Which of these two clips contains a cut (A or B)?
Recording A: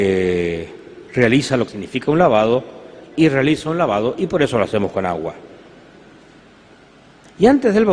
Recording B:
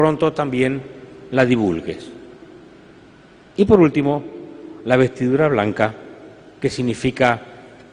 A